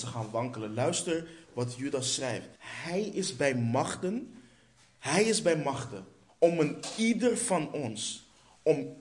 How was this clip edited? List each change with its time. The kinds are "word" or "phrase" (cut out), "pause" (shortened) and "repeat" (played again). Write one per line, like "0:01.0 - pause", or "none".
0:02.6 - pause
0:06.3 - pause